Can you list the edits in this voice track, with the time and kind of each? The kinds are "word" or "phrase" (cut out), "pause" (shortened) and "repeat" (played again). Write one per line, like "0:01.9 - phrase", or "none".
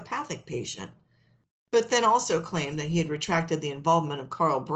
none